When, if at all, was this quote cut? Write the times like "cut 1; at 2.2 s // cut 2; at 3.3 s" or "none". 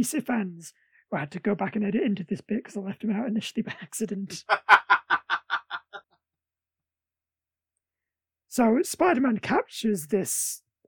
cut 1; at 6.0 s